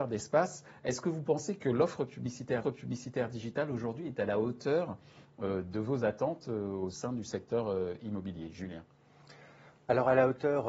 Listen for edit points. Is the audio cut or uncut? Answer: cut